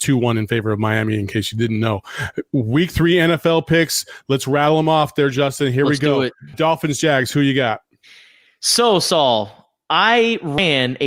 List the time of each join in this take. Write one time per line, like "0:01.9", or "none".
0:06.5

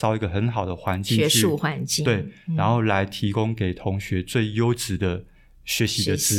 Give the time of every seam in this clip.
none

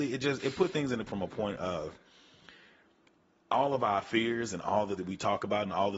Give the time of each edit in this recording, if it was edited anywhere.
0:01.1
0:05.0

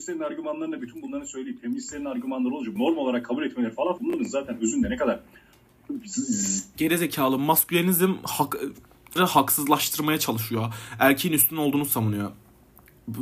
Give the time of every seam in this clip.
0:02.8
0:04.0
0:09.2

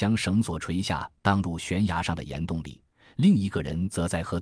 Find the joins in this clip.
none

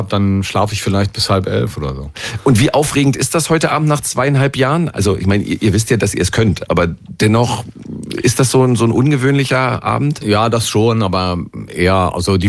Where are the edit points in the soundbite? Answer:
none

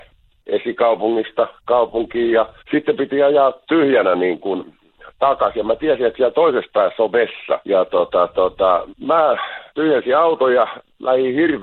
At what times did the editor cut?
0:02.6
0:07.6
0:09.7

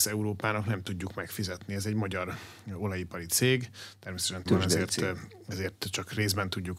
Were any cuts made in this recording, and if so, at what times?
0:04.5

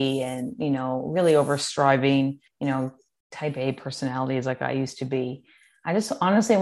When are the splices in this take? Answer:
0:02.5

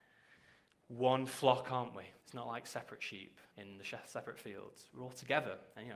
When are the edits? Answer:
0:02.2
0:03.5

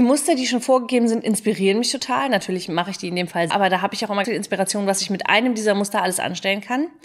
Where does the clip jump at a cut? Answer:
0:03.5
0:04.2

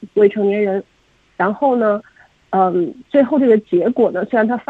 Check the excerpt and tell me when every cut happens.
none

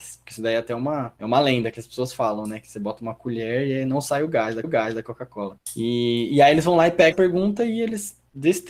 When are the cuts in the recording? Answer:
0:04.6
0:07.1

